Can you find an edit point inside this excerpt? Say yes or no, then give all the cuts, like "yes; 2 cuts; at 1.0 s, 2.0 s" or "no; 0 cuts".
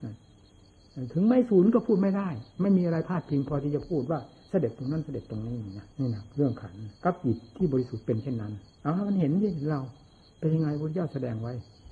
yes; 3 cuts; at 5.9 s, 7.0 s, 8.7 s